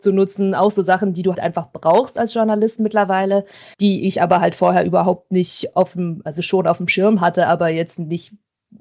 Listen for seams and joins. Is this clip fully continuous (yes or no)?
no